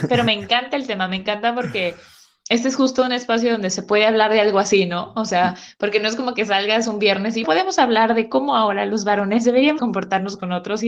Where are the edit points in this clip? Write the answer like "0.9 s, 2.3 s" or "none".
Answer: 7.4 s, 9.8 s